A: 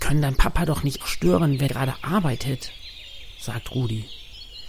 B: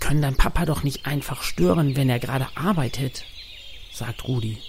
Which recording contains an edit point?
A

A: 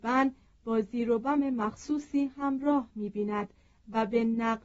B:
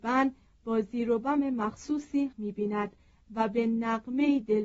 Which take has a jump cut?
B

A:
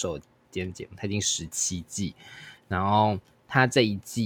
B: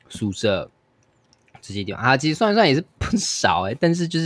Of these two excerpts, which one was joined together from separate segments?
B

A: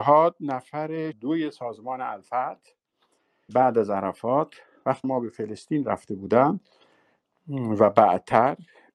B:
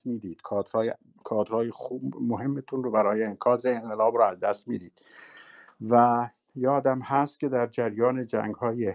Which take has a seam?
A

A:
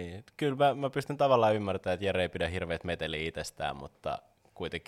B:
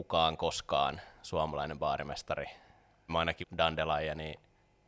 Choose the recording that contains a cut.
B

